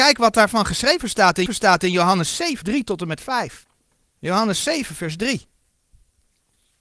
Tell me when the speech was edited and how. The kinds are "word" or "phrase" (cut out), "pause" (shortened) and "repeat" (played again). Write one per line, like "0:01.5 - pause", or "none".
0:01.5 - repeat
0:02.6 - word
0:03.9 - pause